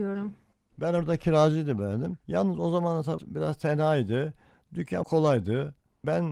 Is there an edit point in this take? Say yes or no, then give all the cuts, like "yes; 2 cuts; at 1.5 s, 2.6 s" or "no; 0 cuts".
yes; 3 cuts; at 2.2 s, 3.2 s, 5.0 s